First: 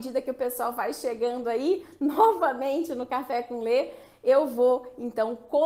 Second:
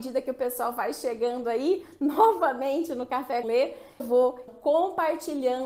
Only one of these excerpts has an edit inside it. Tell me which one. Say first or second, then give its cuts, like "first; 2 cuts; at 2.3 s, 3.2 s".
second; 3 cuts; at 3.4 s, 4.0 s, 4.5 s